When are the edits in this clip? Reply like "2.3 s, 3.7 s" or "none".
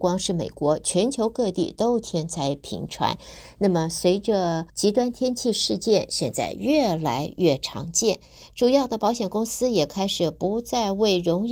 4.7 s